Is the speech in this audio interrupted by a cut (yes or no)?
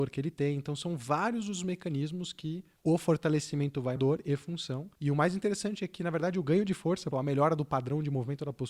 yes